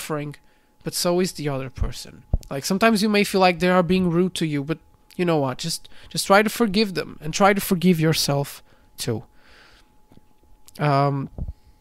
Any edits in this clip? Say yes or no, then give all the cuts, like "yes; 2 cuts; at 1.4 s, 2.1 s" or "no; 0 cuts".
no; 0 cuts